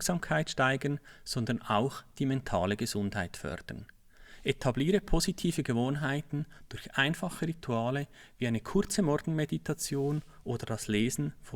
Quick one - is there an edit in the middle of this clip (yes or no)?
no